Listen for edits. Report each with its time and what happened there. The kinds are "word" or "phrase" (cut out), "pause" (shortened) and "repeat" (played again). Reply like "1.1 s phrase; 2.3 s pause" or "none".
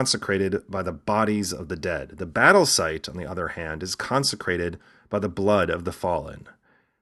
none

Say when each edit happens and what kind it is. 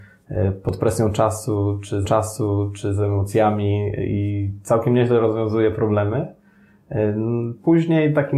2.0 s repeat

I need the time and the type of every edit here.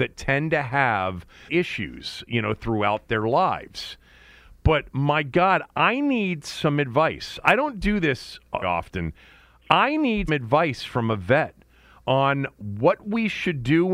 1.5 s word; 8.6 s word; 10.3 s word

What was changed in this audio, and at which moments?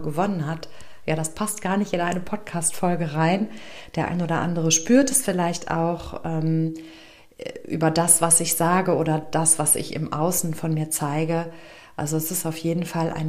none

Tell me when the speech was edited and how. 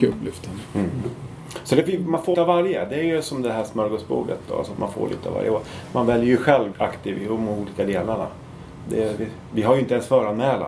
2.3 s word; 6.7 s word

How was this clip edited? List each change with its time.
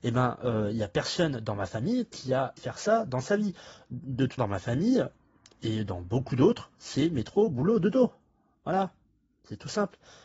2.6 s word; 4.4 s word

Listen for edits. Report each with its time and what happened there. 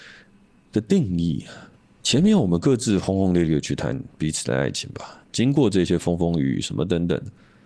1.8 s pause

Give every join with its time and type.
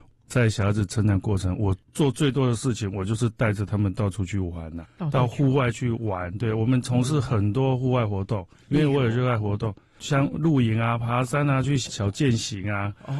none

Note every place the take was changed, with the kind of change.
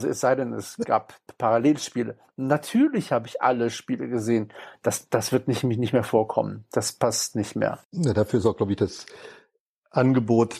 7.8 s pause

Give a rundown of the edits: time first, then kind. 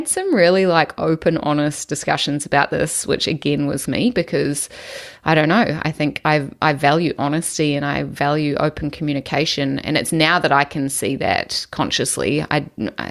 3.8 s phrase

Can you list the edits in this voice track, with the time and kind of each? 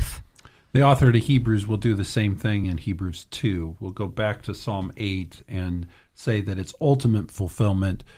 none

